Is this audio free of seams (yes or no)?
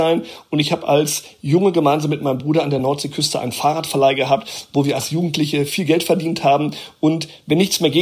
yes